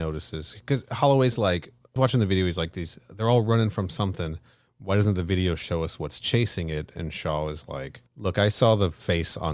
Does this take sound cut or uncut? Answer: cut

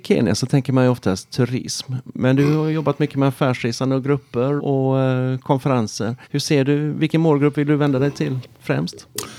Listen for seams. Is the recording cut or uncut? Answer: cut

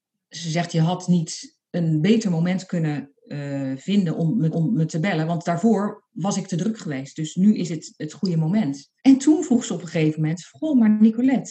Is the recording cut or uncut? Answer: cut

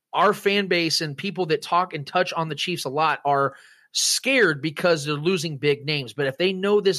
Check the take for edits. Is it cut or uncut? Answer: uncut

